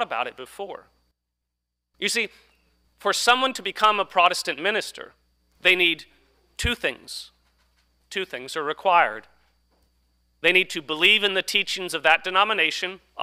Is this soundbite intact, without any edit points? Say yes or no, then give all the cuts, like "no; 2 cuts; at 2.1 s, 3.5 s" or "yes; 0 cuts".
yes; 0 cuts